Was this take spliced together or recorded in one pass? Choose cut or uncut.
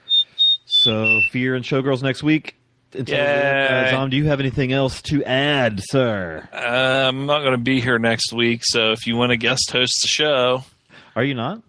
uncut